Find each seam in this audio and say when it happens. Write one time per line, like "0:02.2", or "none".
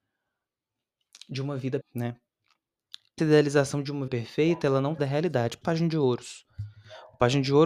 0:01.8
0:03.2
0:04.1
0:05.0
0:05.6